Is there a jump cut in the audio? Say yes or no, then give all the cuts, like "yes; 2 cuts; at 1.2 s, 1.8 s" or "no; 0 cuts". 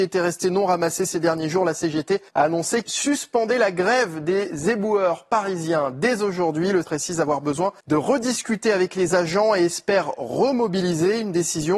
yes; 4 cuts; at 2.3 s, 2.8 s, 6.8 s, 7.8 s